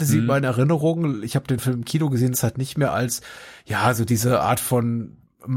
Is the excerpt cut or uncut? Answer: cut